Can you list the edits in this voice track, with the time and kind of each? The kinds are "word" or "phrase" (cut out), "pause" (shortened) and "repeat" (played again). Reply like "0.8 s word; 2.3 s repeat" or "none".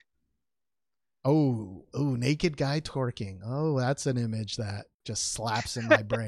4.9 s pause